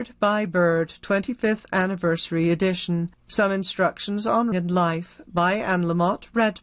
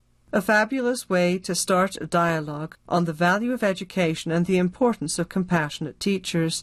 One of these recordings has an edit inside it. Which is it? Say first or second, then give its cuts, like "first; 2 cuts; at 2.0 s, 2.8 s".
first; 2 cuts; at 3.2 s, 4.5 s